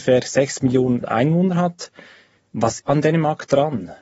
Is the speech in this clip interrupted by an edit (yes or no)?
yes